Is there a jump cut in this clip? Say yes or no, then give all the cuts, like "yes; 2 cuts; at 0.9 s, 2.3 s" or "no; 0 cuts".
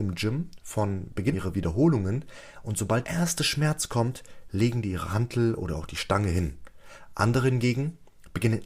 yes; 2 cuts; at 1.3 s, 3.0 s